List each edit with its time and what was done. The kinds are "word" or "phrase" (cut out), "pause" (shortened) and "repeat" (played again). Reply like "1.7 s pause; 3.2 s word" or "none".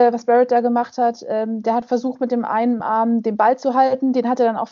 none